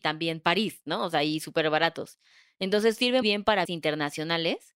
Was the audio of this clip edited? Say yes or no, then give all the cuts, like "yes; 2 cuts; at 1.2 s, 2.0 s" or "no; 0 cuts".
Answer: yes; 2 cuts; at 3.2 s, 3.7 s